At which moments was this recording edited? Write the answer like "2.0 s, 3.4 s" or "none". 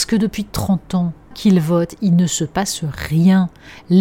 1.3 s